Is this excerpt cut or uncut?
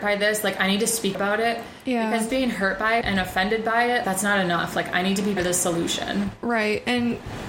cut